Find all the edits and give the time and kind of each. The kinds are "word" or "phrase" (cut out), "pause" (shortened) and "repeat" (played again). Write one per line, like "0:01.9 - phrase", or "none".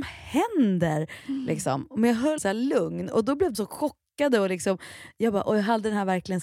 0:02.4 - word
0:03.5 - word